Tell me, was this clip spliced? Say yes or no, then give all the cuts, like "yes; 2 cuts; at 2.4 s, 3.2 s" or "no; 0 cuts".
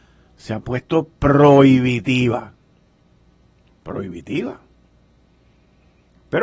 no; 0 cuts